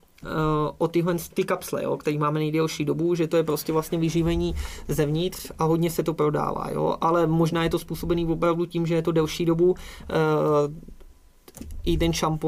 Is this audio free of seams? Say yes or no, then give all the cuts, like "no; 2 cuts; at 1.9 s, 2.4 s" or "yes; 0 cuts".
no; 1 cut; at 1.3 s